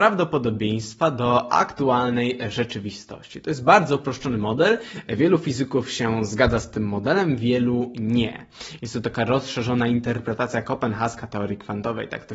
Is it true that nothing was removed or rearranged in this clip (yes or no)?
yes